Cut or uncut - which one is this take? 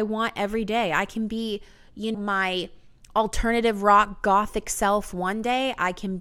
cut